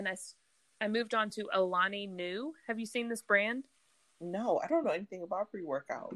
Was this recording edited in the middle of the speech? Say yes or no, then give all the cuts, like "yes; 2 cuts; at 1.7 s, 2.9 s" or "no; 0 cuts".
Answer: no; 0 cuts